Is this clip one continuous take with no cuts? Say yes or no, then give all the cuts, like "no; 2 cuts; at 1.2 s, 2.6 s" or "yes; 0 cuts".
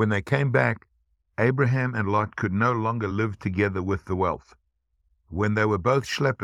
yes; 0 cuts